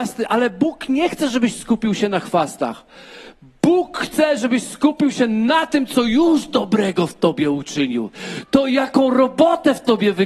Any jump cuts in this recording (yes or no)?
no